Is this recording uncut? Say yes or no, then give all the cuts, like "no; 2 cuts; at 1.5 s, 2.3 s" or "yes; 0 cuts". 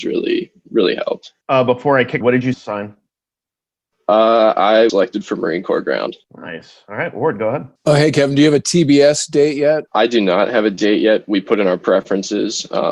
no; 7 cuts; at 1.4 s, 2.2 s, 2.5 s, 4.9 s, 6.2 s, 7.8 s, 9.9 s